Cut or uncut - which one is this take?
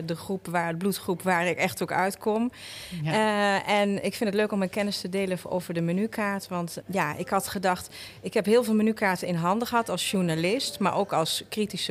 cut